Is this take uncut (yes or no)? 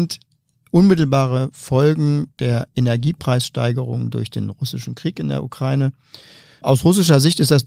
yes